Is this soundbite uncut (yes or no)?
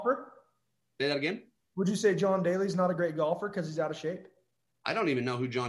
yes